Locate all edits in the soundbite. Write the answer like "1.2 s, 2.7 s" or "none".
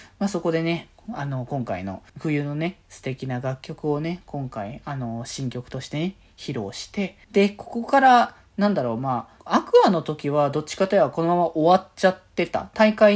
2.1 s, 7.2 s, 9.4 s